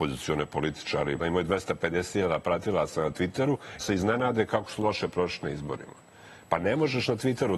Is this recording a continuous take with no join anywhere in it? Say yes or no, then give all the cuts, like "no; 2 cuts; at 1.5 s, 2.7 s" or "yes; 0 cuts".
no; 2 cuts; at 1.2 s, 3.8 s